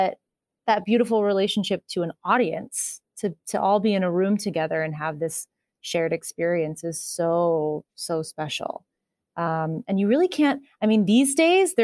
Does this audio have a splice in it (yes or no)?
no